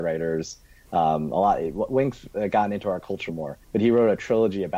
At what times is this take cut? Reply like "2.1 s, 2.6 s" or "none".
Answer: 3.3 s, 3.6 s